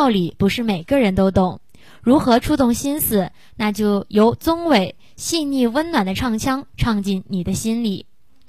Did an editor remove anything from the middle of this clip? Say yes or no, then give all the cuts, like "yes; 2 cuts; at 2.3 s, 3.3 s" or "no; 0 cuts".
no; 0 cuts